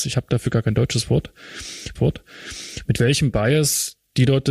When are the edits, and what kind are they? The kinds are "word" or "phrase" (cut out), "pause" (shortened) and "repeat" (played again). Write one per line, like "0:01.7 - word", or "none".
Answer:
0:02.0 - repeat